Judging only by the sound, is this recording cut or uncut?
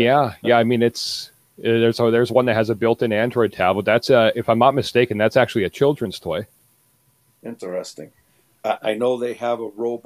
uncut